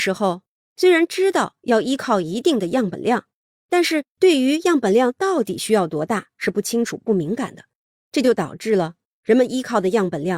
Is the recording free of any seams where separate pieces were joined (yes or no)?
yes